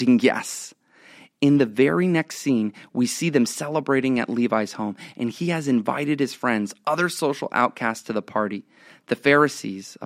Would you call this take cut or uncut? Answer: uncut